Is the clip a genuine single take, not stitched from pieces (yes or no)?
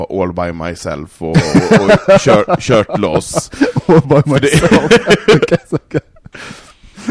yes